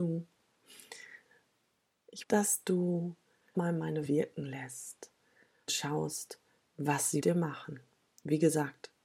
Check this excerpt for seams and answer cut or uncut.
cut